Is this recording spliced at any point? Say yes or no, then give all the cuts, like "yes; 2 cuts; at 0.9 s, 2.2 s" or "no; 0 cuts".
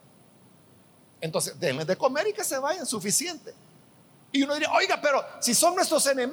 no; 0 cuts